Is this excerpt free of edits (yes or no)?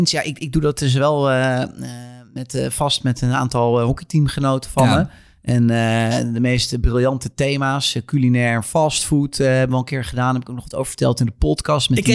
yes